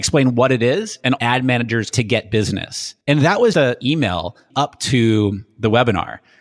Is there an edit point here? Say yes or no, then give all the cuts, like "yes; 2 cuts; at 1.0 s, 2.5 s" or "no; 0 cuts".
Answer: yes; 5 cuts; at 1.2 s, 1.9 s, 3.0 s, 3.5 s, 4.5 s